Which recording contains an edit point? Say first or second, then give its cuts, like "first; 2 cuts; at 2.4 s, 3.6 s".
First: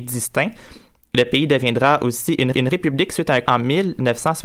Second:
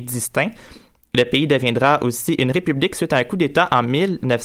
first; 2 cuts; at 2.5 s, 3.4 s